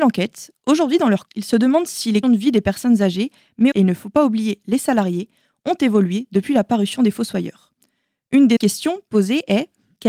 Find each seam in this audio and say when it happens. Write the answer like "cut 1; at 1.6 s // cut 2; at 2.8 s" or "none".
cut 1; at 1.3 s // cut 2; at 2.2 s // cut 3; at 3.7 s // cut 4; at 8.6 s